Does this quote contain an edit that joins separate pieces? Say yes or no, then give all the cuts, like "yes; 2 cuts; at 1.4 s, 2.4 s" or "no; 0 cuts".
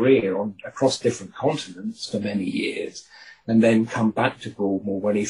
no; 0 cuts